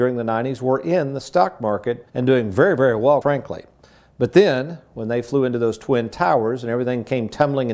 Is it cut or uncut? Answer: cut